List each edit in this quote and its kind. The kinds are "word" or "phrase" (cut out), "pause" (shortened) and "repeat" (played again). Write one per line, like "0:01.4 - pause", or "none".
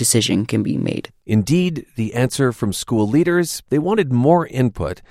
0:01.2 - pause

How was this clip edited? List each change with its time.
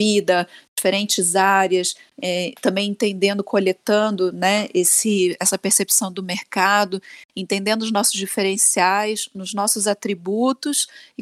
none

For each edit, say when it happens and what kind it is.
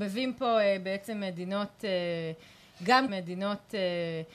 0:03.1 - repeat

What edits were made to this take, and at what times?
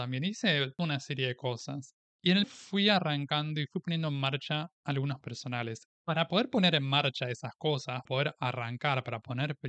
0:02.4 - word
0:05.2 - word
0:05.9 - pause
0:08.0 - word

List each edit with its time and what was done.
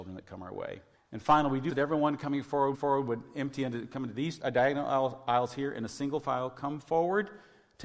0:00.9 - pause
0:01.7 - word
0:02.7 - repeat
0:04.4 - word

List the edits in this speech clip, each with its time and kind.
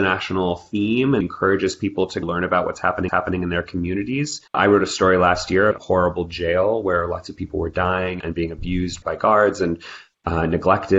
0:01.2 - word
0:02.2 - word
0:03.1 - repeat
0:04.5 - pause
0:05.7 - phrase

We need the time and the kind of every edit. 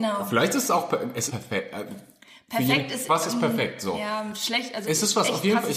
0:01.3 - word
0:03.1 - word
0:04.8 - word

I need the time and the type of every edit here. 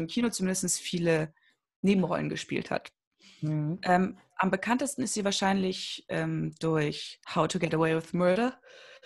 0:07.2 - pause

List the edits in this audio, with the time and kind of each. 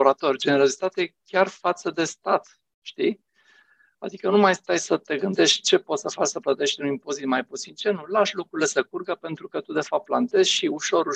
none

